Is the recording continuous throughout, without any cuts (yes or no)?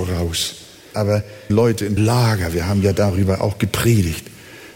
no